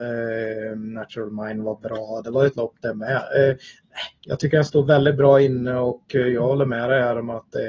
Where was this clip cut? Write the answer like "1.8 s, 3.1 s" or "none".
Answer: 2.5 s